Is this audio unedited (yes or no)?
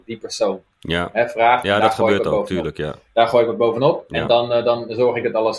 yes